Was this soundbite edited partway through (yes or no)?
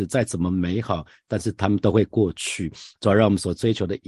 no